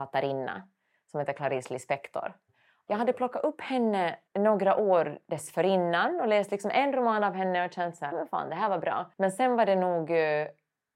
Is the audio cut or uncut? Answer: cut